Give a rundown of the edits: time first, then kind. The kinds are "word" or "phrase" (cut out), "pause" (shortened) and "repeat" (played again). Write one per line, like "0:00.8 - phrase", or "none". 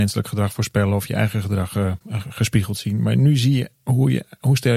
0:02.0 - pause
0:03.8 - pause